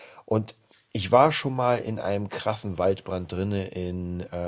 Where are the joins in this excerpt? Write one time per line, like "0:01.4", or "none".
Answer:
none